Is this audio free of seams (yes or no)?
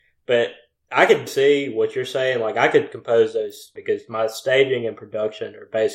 no